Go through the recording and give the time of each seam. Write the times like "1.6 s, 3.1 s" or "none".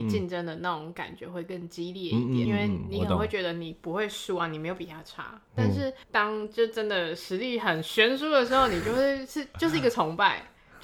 2.4 s, 6.0 s